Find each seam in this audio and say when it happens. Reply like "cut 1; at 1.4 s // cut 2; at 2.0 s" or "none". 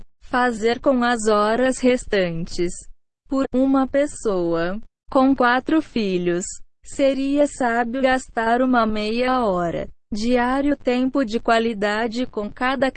cut 1; at 3.4 s // cut 2; at 8.0 s // cut 3; at 10.0 s